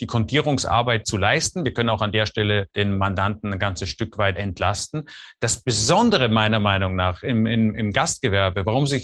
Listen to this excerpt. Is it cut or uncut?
cut